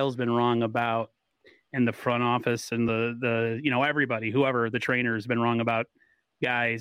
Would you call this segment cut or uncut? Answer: uncut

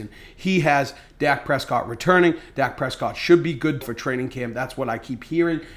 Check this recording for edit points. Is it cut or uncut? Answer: cut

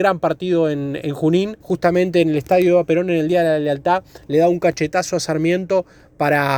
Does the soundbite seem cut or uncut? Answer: cut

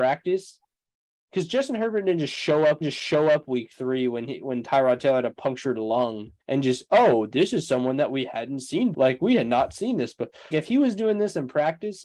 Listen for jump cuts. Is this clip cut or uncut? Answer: cut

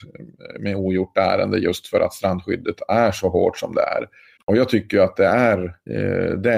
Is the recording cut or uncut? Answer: cut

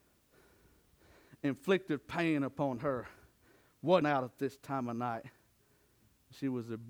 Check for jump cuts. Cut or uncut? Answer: cut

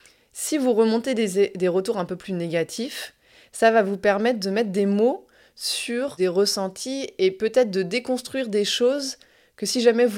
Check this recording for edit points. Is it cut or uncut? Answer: uncut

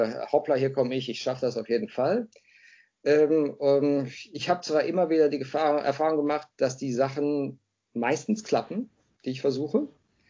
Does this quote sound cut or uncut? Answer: uncut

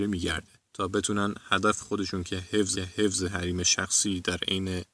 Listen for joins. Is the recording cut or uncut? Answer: cut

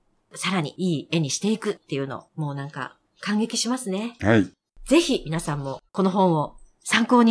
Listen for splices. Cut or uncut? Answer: cut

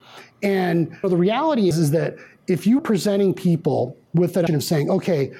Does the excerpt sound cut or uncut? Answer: cut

